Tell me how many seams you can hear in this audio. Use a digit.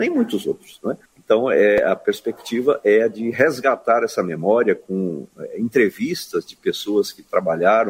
1